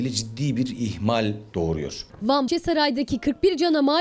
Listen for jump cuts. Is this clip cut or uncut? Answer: cut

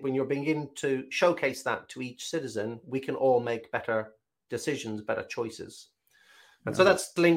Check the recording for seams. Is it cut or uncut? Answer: uncut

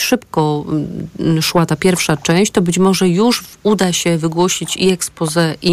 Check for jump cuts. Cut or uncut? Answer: uncut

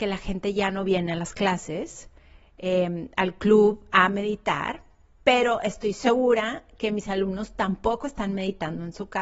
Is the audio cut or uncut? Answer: uncut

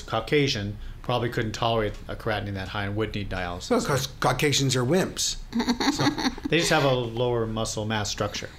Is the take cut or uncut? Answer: uncut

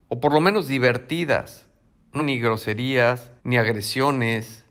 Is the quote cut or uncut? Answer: cut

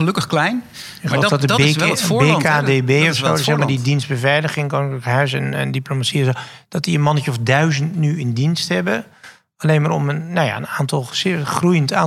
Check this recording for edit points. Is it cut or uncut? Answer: uncut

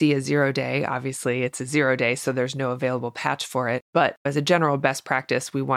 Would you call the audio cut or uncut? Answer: uncut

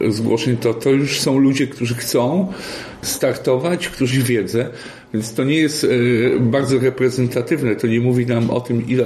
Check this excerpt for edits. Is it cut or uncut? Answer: cut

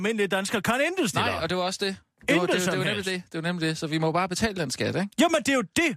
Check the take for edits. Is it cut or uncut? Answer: uncut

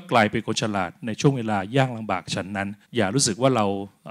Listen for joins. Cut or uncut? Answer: cut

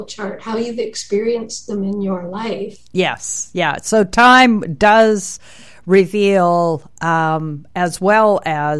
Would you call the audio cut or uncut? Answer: uncut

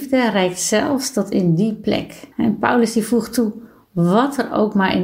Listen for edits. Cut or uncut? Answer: cut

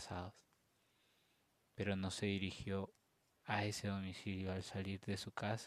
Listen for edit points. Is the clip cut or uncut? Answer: uncut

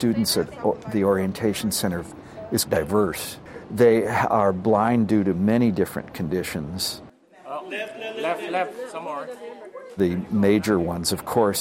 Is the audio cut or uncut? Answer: cut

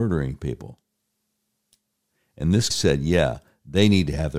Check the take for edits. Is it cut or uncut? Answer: cut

